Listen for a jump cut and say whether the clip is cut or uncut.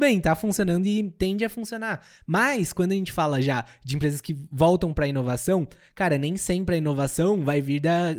uncut